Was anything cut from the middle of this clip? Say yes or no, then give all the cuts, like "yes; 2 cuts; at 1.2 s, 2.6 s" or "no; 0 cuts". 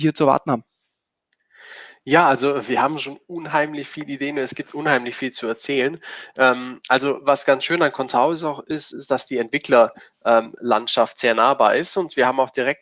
no; 0 cuts